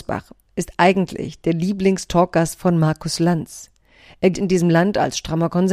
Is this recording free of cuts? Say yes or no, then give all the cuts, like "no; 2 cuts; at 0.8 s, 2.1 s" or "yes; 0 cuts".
no; 1 cut; at 4.3 s